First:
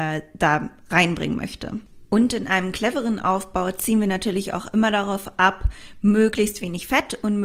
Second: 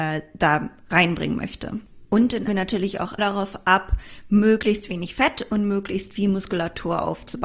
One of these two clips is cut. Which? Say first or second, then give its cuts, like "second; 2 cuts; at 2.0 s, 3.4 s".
second; 2 cuts; at 2.5 s, 3.2 s